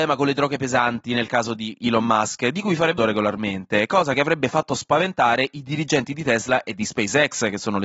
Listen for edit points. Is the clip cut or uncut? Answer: cut